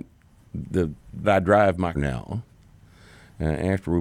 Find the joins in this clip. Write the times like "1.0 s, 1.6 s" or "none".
1.2 s, 1.9 s